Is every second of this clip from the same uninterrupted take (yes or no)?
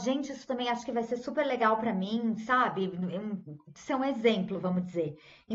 yes